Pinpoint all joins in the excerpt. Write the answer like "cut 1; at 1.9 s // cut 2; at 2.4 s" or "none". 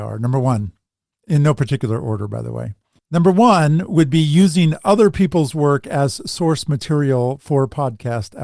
none

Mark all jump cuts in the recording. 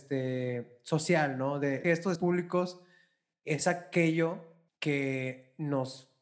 cut 1; at 1.8 s // cut 2; at 2.2 s // cut 3; at 4.7 s

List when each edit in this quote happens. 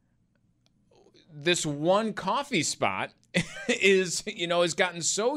none

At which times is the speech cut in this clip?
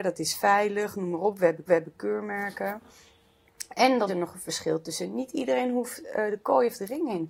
cut 1; at 1.7 s // cut 2; at 4.1 s

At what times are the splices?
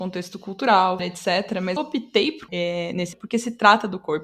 cut 1; at 1.0 s // cut 2; at 1.8 s // cut 3; at 2.5 s // cut 4; at 3.1 s

